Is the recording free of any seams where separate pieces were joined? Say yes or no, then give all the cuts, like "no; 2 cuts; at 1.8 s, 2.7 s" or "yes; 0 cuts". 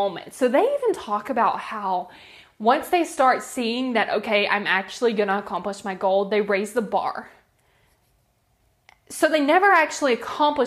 yes; 0 cuts